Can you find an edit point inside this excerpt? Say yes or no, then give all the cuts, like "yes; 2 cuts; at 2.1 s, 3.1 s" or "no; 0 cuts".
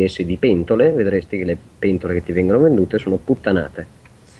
no; 0 cuts